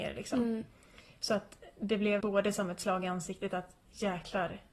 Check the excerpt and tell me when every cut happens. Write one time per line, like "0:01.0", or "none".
0:02.2